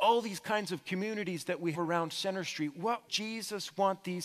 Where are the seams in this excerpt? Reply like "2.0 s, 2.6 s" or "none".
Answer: 1.7 s, 3.1 s